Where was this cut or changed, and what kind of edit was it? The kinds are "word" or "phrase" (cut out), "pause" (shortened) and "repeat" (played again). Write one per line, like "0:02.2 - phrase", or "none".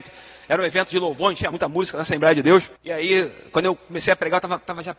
0:01.5 - word
0:02.8 - pause